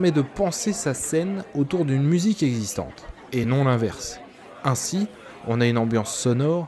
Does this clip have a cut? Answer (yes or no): no